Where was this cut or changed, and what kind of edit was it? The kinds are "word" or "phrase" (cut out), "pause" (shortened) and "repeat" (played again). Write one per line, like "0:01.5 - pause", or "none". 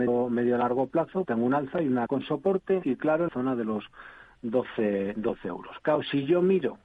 0:01.2 - word
0:02.1 - word
0:02.8 - word
0:03.3 - word